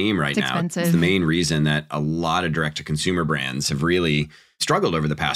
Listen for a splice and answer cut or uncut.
uncut